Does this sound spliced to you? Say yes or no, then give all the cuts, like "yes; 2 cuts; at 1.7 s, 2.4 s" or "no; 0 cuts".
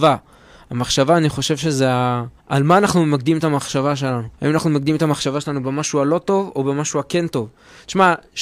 yes; 2 cuts; at 2.4 s, 4.3 s